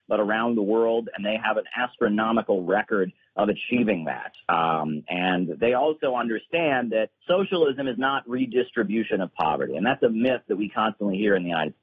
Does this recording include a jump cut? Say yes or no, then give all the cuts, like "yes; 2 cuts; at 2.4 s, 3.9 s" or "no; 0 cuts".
yes; 1 cut; at 7.2 s